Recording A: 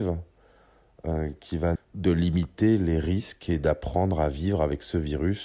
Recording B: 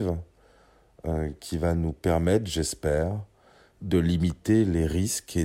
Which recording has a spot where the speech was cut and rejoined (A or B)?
A